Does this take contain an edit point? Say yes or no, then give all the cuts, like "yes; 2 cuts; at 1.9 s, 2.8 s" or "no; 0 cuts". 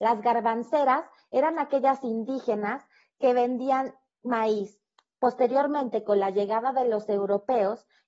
no; 0 cuts